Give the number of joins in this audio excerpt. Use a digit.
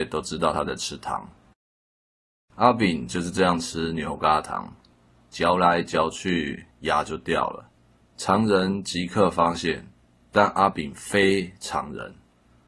0